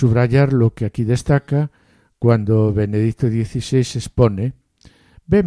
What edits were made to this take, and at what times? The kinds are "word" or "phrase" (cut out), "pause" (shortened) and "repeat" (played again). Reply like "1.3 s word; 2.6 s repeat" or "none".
none

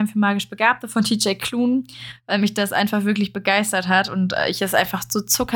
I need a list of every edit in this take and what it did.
none

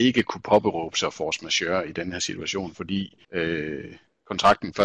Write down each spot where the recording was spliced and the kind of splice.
3.2 s pause

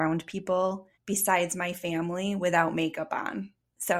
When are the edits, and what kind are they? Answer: 0.9 s pause

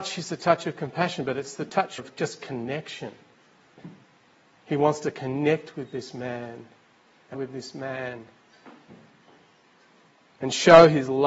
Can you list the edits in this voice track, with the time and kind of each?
2.0 s word; 7.3 s word

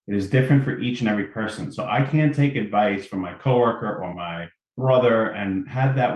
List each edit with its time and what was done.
4.1 s phrase

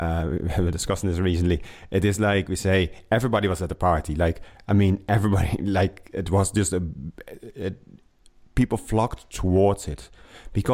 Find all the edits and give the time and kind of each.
none

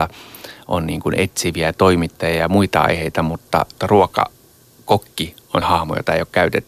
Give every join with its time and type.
3.8 s word; 5.6 s word

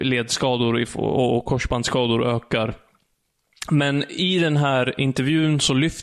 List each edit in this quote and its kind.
none

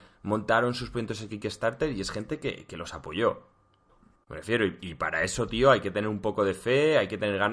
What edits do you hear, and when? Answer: none

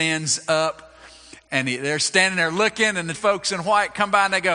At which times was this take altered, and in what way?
3.1 s word

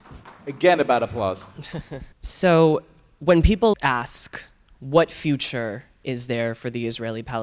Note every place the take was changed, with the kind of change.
2.1 s pause; 3.7 s word

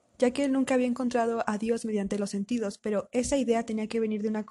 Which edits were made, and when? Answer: none

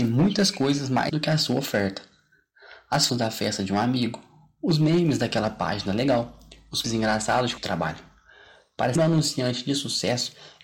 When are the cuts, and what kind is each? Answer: 1.1 s word; 3.1 s word; 6.8 s word; 7.6 s word; 9.0 s word

